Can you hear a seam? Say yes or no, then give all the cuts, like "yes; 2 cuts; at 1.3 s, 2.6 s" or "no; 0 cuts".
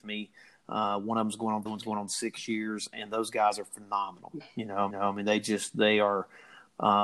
yes; 2 cuts; at 1.7 s, 4.9 s